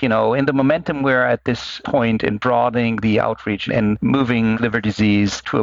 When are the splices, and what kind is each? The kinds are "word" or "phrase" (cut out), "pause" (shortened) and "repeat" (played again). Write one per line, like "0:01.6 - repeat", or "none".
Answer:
0:03.7 - word
0:04.5 - word